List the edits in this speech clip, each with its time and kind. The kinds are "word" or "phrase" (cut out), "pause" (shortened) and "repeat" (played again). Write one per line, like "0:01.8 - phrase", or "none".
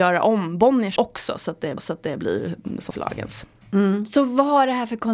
0:01.0 - word
0:01.8 - repeat
0:02.9 - phrase